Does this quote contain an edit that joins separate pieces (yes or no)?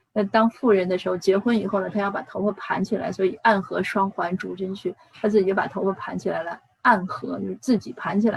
no